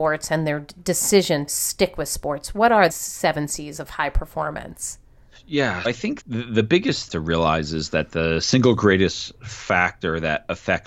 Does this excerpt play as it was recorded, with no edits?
no; 5 cuts; at 1.5 s, 2.9 s, 5.8 s, 6.2 s, 7.1 s

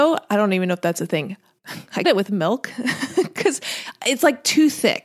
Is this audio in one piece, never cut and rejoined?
no; 1 cut; at 2.0 s

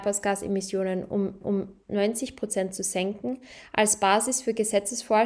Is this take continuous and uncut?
no; 1 cut; at 1.4 s

